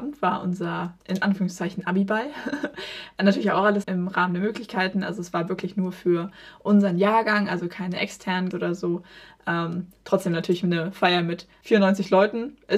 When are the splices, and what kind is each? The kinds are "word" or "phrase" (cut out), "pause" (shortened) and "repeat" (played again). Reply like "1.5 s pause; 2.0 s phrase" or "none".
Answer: 1.0 s word; 3.8 s word; 8.5 s word